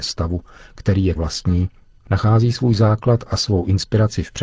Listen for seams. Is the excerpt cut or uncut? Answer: cut